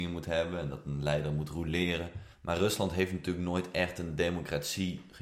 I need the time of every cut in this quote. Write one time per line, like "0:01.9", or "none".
0:02.3